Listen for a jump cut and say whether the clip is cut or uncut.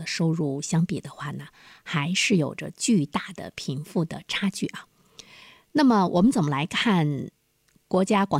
uncut